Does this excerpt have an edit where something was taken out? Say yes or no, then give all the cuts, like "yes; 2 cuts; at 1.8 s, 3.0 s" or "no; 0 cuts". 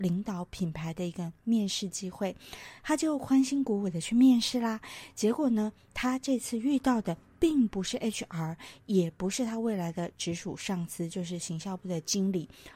no; 0 cuts